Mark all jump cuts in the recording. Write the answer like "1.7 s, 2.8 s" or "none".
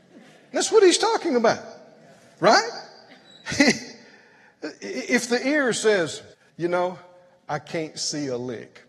6.3 s